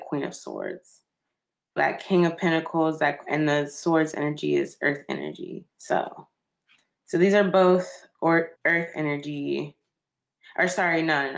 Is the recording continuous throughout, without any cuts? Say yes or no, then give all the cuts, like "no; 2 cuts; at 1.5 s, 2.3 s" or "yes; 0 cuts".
no; 3 cuts; at 1.8 s, 5.7 s, 8.6 s